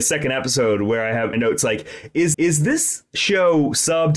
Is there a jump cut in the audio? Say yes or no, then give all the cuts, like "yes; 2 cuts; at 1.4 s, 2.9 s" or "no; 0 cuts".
yes; 2 cuts; at 1.3 s, 2.3 s